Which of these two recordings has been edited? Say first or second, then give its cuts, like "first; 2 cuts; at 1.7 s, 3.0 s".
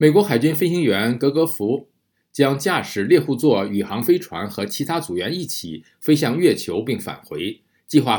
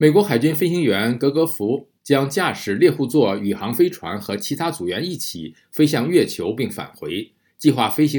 second; 1 cut; at 2.0 s